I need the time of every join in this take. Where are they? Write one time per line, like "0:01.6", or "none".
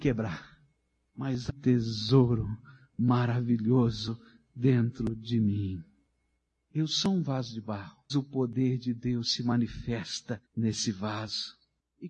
0:01.5
0:08.1
0:10.5

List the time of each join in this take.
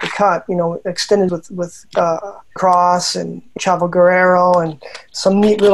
0:01.3
0:02.6
0:03.6

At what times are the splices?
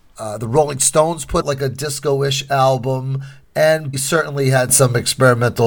0:01.4
0:03.9

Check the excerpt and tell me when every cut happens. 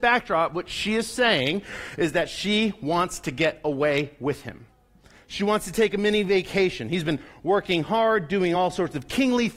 none

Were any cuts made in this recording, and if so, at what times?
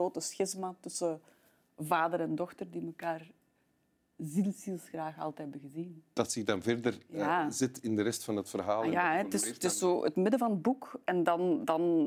none

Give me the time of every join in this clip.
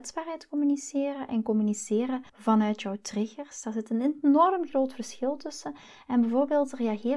0:02.3

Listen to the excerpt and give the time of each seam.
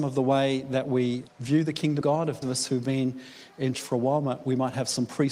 0:01.3
0:02.0
0:02.4
0:03.7

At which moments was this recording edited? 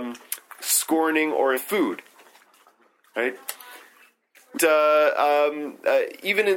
0:01.6
0:04.6

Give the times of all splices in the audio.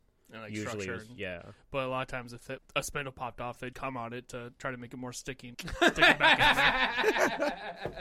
0:02.6
0:03.7
0:05.5

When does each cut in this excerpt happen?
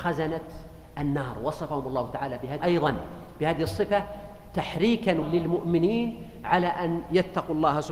0:02.6
0:05.2

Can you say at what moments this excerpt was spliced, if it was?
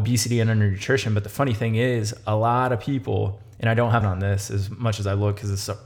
0:04.0

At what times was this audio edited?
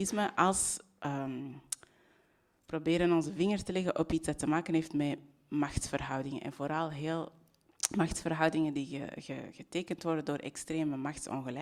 none

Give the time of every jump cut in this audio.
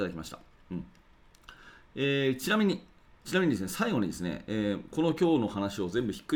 none

